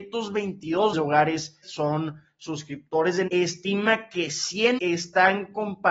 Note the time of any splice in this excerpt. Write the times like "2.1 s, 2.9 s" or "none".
0.9 s, 1.6 s, 3.3 s, 4.8 s